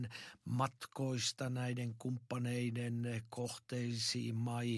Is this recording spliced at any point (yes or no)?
no